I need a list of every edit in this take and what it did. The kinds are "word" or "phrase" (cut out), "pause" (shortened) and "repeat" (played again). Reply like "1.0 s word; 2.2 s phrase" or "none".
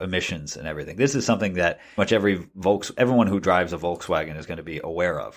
2.0 s word